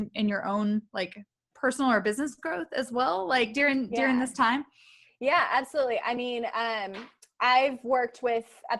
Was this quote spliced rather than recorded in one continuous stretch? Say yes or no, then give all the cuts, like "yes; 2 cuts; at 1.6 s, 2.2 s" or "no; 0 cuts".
no; 0 cuts